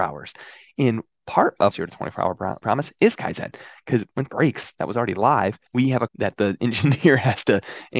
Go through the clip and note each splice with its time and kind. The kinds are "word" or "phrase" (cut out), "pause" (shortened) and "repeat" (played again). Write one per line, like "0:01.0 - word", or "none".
0:01.7 - word
0:02.6 - word
0:04.3 - word
0:05.7 - pause
0:06.1 - word